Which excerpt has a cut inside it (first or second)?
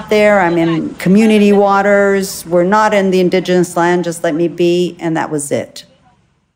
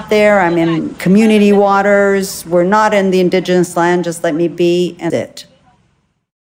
second